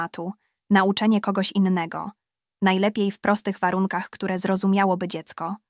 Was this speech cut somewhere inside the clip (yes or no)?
no